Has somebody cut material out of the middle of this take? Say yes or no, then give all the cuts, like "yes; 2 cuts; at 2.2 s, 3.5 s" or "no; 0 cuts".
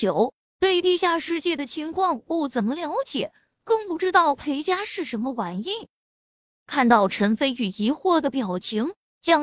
no; 0 cuts